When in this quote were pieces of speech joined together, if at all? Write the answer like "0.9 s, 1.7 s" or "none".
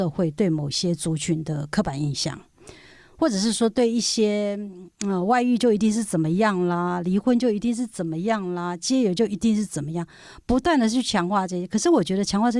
none